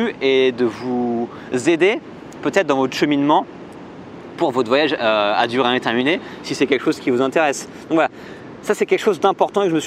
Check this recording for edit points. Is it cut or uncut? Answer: uncut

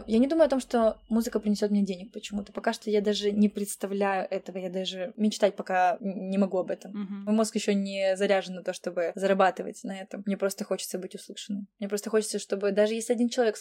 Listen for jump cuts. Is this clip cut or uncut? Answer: uncut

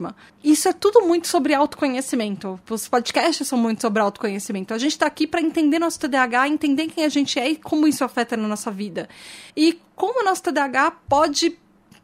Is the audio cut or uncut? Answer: cut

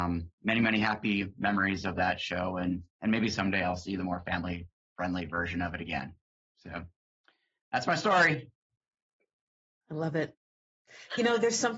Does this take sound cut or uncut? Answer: uncut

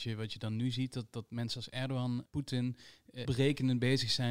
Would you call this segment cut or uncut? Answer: cut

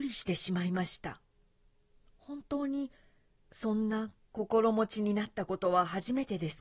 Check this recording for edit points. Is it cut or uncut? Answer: uncut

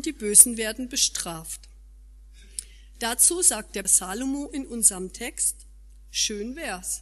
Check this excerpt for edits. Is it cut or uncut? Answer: cut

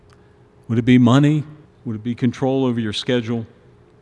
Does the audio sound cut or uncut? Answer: cut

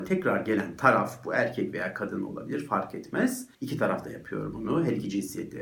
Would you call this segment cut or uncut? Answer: cut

